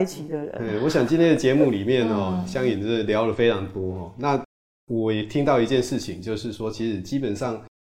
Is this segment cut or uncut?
uncut